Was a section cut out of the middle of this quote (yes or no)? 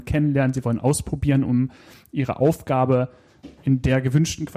no